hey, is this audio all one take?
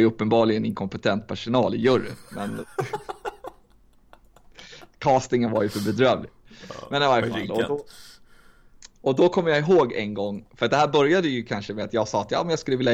yes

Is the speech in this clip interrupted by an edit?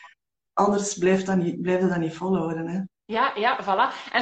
yes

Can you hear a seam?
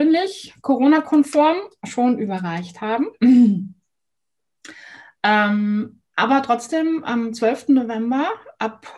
no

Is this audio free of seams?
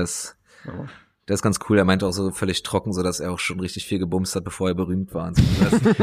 yes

